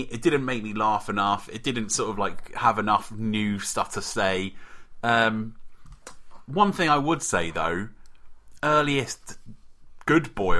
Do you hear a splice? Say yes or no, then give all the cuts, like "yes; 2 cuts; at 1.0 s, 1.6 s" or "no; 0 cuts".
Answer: no; 0 cuts